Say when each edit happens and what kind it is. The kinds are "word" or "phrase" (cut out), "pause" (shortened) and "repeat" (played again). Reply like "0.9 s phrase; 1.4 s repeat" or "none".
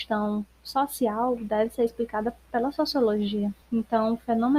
3.6 s pause